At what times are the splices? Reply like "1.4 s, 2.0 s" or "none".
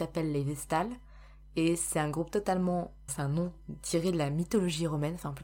3.1 s

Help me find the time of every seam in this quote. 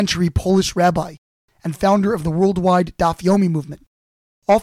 none

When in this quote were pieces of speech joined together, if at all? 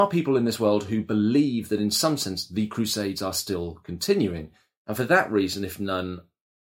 none

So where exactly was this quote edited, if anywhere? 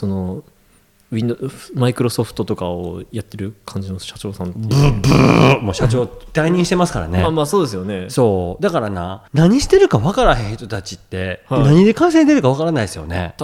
9.3 s

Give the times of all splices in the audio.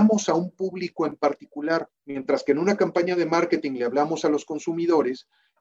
2.0 s

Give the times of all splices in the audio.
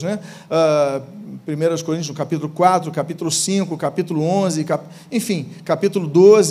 none

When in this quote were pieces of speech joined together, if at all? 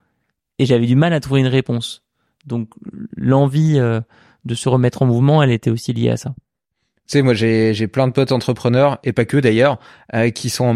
none

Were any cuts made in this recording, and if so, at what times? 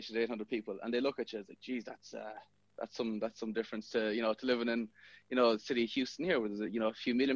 none

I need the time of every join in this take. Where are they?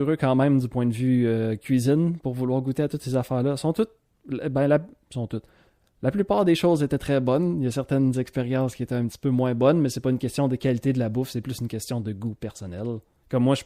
none

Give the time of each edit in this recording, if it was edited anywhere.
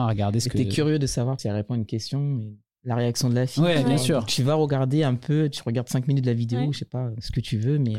1.4 s

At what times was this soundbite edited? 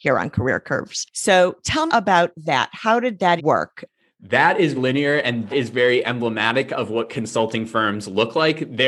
1.9 s, 3.4 s, 4.7 s, 5.5 s

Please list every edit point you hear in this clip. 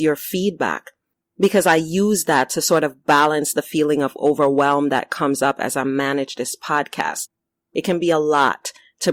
none

